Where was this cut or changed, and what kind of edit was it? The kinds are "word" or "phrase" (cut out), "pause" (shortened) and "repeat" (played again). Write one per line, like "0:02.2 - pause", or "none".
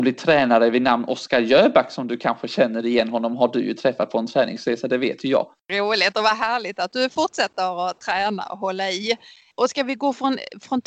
none